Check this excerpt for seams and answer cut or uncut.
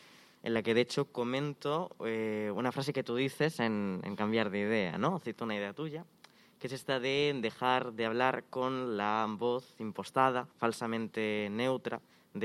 cut